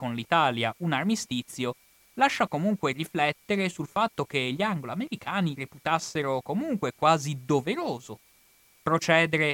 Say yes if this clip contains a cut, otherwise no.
no